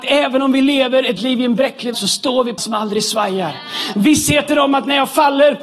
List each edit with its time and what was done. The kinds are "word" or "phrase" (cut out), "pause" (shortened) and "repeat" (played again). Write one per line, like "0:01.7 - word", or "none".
0:01.2 - word
0:01.9 - word
0:02.6 - phrase

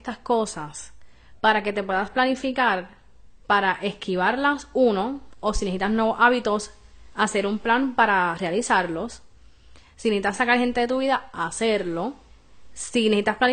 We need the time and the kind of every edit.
0:03.4 - pause

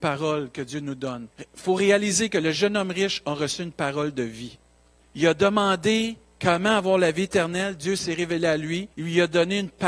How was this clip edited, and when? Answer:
0:01.3 - pause
0:05.0 - pause
0:08.9 - pause

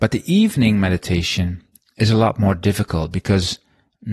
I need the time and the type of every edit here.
none

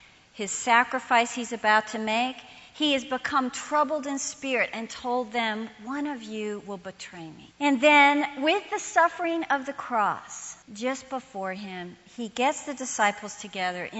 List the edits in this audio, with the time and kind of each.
0:07.5 - pause
0:10.6 - pause

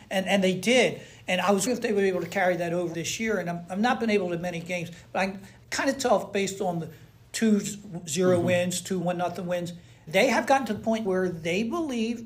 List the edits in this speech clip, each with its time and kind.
0:01.7 - word
0:02.9 - word
0:09.0 - word
0:10.1 - word
0:11.0 - word

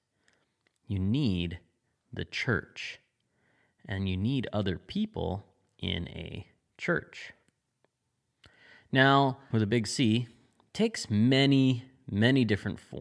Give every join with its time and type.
0:09.5 - phrase

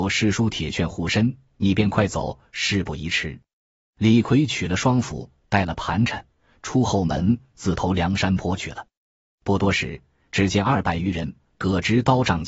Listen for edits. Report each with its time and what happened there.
none

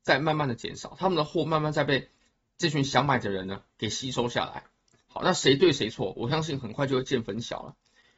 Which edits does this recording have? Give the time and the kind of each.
none

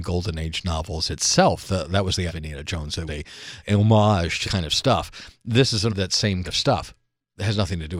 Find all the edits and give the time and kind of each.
0:02.3 - word
0:03.1 - word
0:03.6 - word
0:04.4 - word
0:05.9 - word
0:06.4 - word

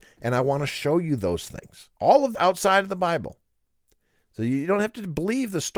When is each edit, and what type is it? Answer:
0:01.9 - pause
0:02.3 - word

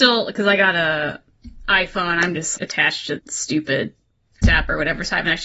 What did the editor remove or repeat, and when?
0:02.6 - word
0:03.2 - word
0:04.4 - word

